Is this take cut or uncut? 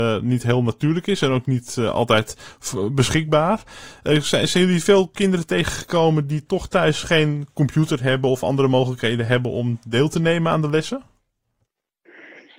uncut